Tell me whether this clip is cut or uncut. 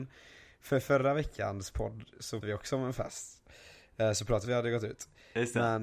cut